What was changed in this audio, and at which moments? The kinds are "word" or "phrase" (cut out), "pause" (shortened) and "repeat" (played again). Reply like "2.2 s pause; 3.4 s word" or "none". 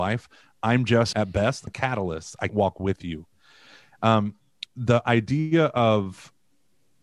1.1 s word; 1.7 s word; 2.5 s word; 4.7 s word